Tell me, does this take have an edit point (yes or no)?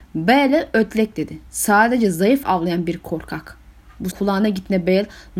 yes